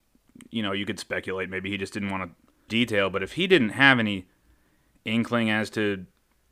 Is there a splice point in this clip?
yes; 1 cut; at 2.7 s

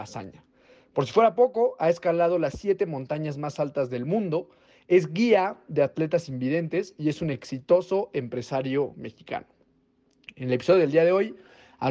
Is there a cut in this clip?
no; 0 cuts

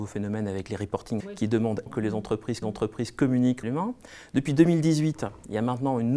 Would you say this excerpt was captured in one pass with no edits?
no; 4 cuts; at 1.2 s, 1.9 s, 2.6 s, 3.6 s

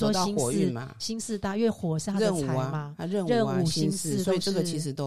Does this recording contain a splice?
no; 0 cuts

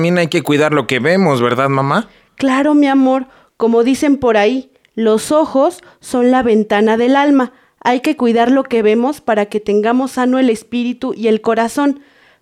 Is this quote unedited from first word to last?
yes; 0 cuts

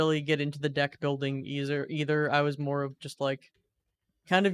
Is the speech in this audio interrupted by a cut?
no; 0 cuts

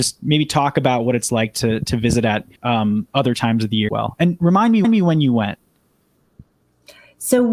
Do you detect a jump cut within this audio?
yes; 3 cuts; at 2.6 s, 3.9 s, 4.8 s

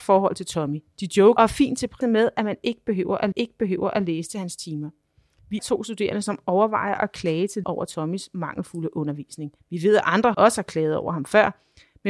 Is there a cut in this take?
yes; 7 cuts; at 1.4 s, 2.0 s, 3.3 s, 5.6 s, 7.6 s, 9.6 s, 10.3 s

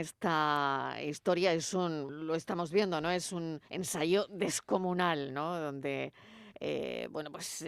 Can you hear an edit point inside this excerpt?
yes; 2 cuts; at 2.1 s, 3.7 s

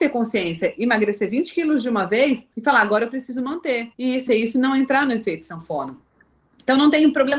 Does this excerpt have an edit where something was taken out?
yes; 3 cuts; at 2.5 s, 3.9 s, 4.3 s

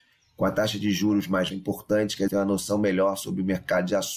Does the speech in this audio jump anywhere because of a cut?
yes; 2 cuts; at 1.5 s, 2.3 s

